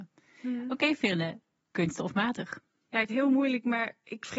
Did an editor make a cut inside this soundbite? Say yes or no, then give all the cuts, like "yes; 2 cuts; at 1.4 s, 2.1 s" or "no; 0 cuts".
yes; 1 cut; at 3.1 s